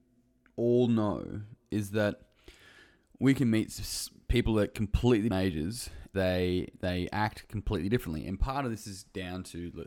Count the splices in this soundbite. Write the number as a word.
two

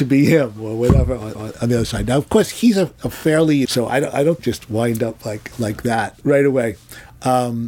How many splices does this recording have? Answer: five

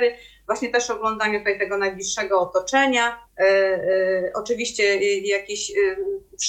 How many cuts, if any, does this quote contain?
one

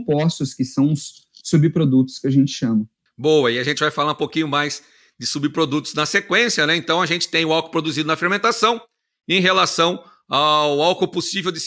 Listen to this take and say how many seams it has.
zero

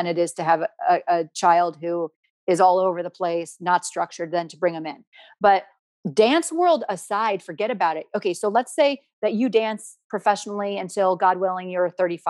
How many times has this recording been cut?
zero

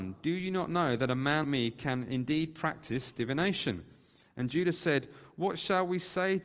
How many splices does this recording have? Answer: one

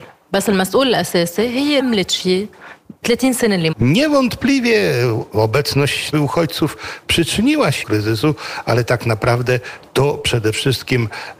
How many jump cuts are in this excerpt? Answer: five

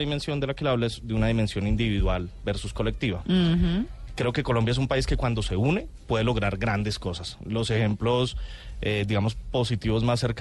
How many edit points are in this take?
zero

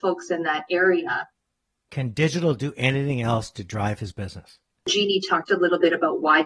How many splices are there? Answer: zero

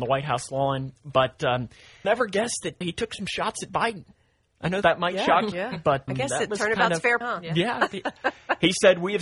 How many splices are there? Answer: six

